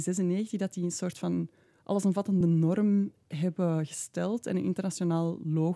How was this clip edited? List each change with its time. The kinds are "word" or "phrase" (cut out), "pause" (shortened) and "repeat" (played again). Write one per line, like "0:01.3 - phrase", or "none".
none